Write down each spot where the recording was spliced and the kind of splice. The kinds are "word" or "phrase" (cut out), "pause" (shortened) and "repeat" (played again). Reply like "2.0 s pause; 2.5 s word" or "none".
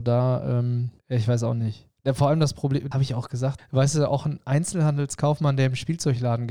1.0 s pause; 2.9 s word; 3.6 s word